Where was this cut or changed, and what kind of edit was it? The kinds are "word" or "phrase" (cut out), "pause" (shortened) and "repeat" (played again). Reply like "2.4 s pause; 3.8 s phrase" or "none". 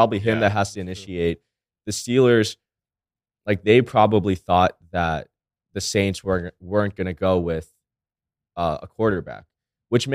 none